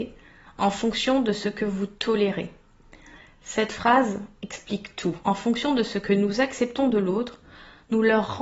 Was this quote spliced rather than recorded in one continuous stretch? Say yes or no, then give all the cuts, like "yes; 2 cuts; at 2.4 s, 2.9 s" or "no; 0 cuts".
no; 0 cuts